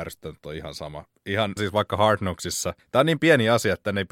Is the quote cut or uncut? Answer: cut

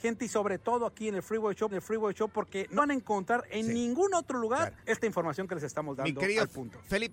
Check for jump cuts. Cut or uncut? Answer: cut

